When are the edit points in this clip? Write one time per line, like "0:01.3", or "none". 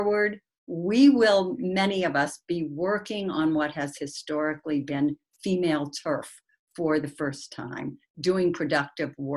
none

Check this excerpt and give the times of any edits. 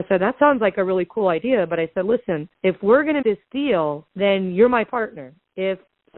0:02.5
0:03.2
0:04.1

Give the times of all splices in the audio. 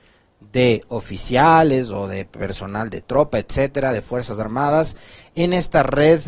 none

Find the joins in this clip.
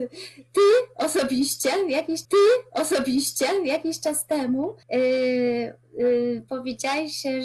0:02.2
0:04.8

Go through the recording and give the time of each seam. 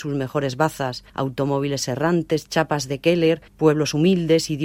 0:01.1
0:03.5

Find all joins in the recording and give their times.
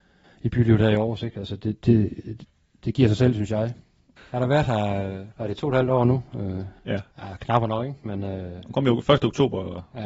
0:05.3
0:07.1

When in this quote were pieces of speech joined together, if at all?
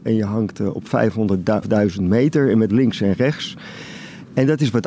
0:01.6
0:02.7

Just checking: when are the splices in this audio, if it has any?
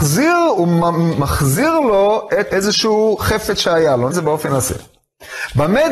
0:02.5
0:04.1

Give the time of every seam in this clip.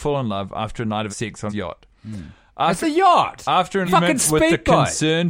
0:01.1
0:01.5
0:02.8
0:03.8

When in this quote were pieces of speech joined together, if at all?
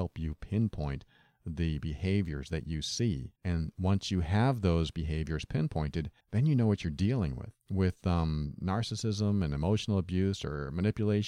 0:03.4
0:06.2
0:07.6

